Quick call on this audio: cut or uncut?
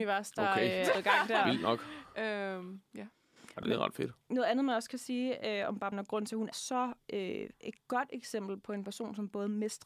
cut